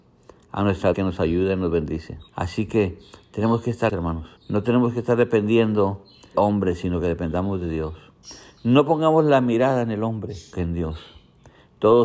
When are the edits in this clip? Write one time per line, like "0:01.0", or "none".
0:00.9
0:02.3
0:03.9
0:04.4
0:06.3
0:10.5